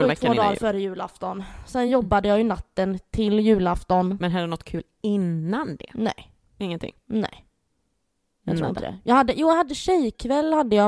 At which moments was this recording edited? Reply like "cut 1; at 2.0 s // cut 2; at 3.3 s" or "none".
none